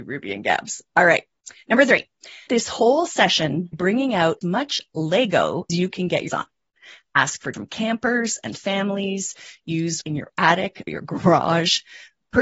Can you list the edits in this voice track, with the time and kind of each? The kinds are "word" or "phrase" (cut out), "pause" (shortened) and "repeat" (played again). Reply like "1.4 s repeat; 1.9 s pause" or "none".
2.5 s word; 3.7 s word; 4.4 s word; 5.7 s word; 6.3 s word; 7.5 s word; 10.0 s word; 10.9 s word